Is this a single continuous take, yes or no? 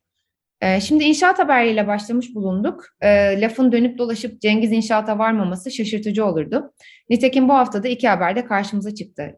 yes